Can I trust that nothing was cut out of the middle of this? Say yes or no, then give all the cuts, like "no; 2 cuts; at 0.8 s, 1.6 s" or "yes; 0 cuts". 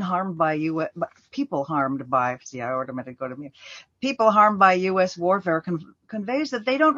yes; 0 cuts